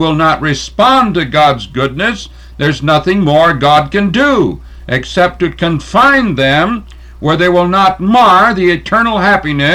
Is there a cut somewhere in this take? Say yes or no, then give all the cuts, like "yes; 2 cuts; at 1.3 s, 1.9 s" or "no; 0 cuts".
no; 0 cuts